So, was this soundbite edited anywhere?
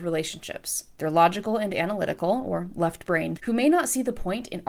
yes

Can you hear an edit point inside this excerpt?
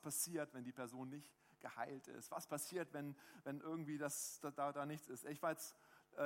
no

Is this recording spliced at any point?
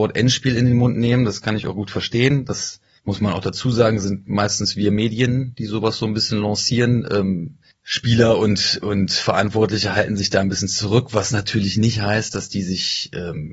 no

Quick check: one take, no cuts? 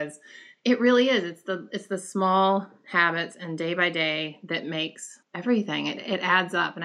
no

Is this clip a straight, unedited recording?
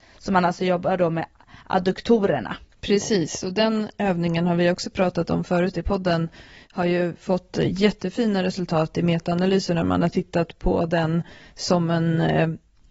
yes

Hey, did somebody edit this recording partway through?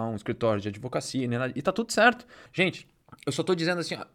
no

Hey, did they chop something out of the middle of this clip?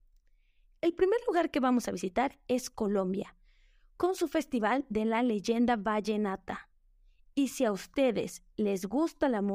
no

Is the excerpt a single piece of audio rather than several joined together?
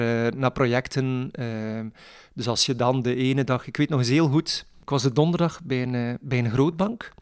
yes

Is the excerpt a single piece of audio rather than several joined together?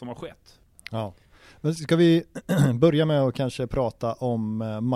yes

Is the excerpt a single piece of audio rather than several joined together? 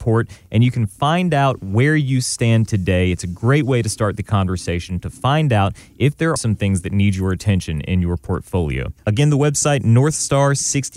no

